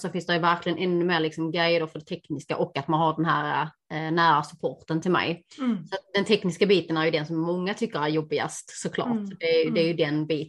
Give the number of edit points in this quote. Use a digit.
1